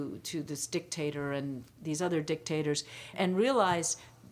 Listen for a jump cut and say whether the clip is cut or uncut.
cut